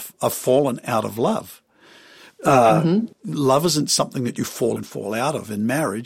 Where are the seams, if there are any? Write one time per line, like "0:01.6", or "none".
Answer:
0:04.8